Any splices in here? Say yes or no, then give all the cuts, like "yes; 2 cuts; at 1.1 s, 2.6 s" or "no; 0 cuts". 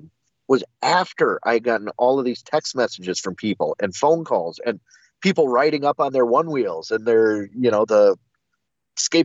no; 0 cuts